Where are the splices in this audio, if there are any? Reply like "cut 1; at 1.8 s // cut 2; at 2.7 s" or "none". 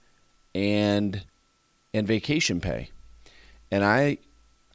none

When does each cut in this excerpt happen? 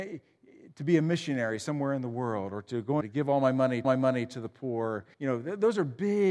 cut 1; at 3.0 s // cut 2; at 3.8 s // cut 3; at 5.1 s

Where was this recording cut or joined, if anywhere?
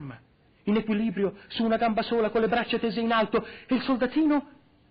none

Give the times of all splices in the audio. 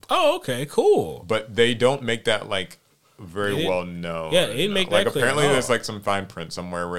none

